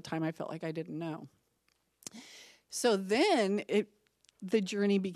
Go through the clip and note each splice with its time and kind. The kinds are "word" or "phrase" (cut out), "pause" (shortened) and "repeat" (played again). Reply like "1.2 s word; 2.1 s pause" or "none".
none